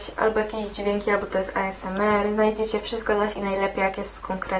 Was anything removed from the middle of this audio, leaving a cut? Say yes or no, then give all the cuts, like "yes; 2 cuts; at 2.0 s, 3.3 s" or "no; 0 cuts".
yes; 1 cut; at 3.3 s